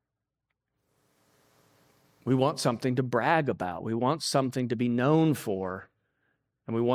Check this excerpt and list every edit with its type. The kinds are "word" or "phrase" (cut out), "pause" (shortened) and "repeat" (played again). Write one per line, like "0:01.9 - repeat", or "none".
none